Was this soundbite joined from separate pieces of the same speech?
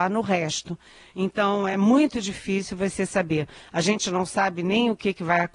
no; 0 cuts

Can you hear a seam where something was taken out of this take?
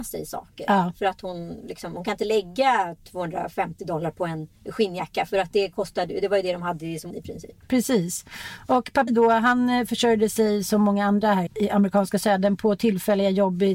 yes; 4 cuts; at 4.6 s, 7.1 s, 9.1 s, 11.5 s

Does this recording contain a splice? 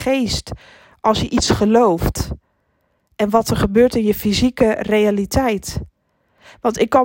no; 0 cuts

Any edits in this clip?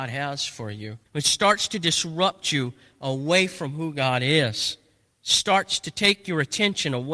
yes; 1 cut; at 1.1 s

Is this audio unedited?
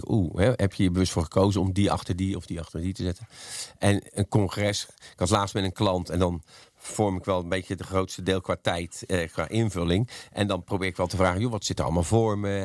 yes; 0 cuts

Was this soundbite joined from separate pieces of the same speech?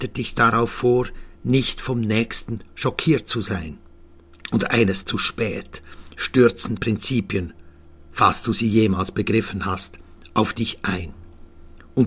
yes; 2 cuts; at 5.0 s, 6.8 s

